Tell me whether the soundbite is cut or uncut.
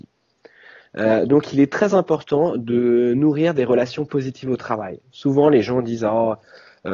uncut